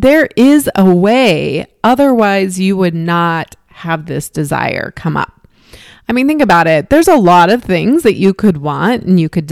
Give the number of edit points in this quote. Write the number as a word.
zero